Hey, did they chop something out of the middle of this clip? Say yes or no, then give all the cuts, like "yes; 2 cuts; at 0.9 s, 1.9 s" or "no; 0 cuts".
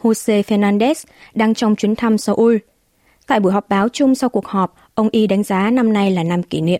no; 0 cuts